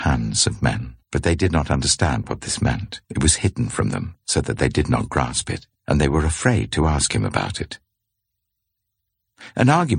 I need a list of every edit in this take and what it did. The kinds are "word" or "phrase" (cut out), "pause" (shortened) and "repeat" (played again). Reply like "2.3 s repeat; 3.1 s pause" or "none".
1.0 s pause; 3.0 s pause; 5.8 s pause